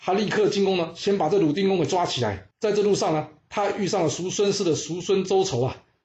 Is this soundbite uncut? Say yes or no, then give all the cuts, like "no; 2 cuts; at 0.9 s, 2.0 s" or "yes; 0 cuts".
no; 1 cut; at 2.5 s